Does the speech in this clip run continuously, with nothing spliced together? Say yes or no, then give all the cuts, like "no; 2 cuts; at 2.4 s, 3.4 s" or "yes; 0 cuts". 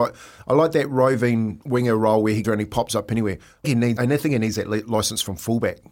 no; 4 cuts; at 1.6 s, 2.4 s, 3.6 s, 4.0 s